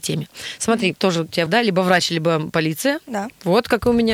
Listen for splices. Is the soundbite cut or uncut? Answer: cut